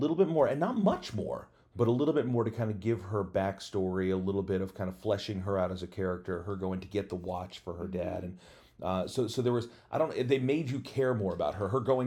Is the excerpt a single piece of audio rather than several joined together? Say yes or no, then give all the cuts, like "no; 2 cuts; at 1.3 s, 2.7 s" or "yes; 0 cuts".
yes; 0 cuts